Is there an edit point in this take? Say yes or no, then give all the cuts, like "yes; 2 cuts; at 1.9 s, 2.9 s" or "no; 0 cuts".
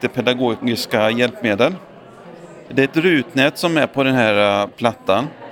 no; 0 cuts